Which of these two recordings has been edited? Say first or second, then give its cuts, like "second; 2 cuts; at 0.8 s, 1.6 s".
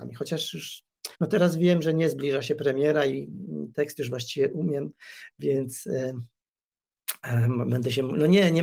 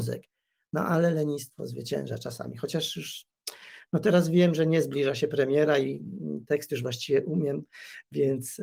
first; 1 cut; at 1.1 s